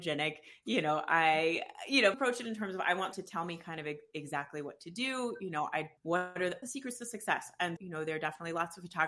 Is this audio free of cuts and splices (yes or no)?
no